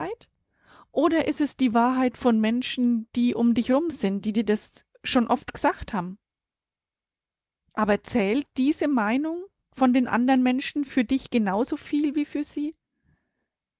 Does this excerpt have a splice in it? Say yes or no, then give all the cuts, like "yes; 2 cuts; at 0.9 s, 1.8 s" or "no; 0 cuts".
no; 0 cuts